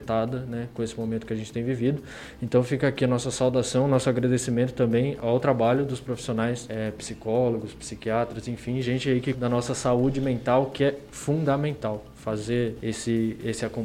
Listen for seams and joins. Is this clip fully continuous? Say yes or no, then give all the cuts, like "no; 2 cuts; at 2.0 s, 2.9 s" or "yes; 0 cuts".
no; 1 cut; at 9.3 s